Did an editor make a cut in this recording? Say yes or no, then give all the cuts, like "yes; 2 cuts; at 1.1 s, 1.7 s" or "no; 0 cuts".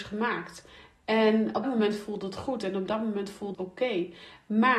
yes; 2 cuts; at 1.6 s, 3.5 s